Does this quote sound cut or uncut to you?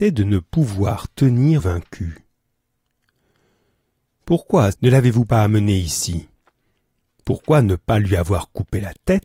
cut